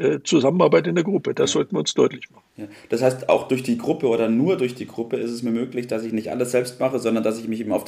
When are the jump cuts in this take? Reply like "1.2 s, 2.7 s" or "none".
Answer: none